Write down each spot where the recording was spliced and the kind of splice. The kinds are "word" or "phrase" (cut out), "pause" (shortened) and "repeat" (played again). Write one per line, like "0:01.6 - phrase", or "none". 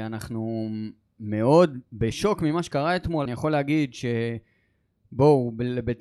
0:03.3 - phrase